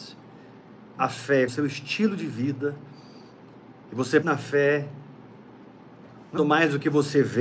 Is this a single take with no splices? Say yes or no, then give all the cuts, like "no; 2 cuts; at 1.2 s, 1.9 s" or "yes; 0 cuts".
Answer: no; 4 cuts; at 1.0 s, 1.5 s, 4.2 s, 6.4 s